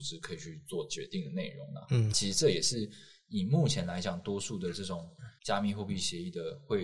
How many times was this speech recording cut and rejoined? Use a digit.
2